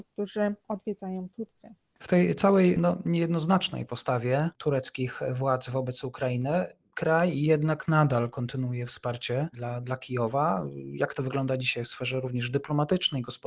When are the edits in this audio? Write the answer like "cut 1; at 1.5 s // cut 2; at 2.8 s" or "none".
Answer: cut 1; at 9.5 s